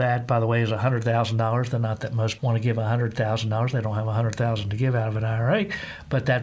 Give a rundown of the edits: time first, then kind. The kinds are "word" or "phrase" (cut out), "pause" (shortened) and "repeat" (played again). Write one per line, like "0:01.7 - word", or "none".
0:02.4 - word